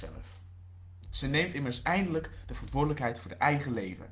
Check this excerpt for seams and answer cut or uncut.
uncut